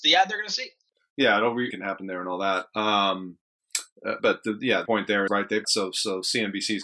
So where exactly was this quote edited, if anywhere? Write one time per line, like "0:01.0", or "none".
0:01.7
0:04.2
0:04.9
0:05.3
0:05.6